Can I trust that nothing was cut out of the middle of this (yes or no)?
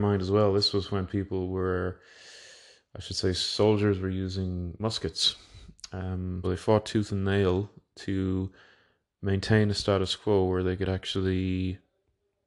no